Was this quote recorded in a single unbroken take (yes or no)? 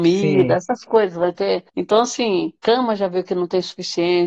no